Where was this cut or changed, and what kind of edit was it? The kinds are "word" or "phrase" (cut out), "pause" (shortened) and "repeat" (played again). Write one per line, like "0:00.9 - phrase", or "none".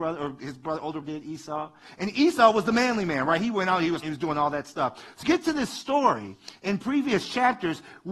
0:01.0 - word
0:04.0 - word
0:05.2 - word